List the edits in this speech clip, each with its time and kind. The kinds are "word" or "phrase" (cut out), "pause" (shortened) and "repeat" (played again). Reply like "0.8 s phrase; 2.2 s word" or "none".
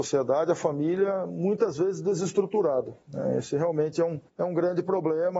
3.0 s pause; 4.3 s pause